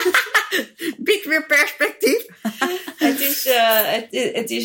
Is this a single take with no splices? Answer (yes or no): yes